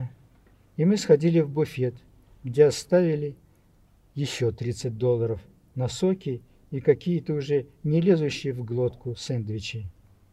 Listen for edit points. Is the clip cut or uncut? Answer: uncut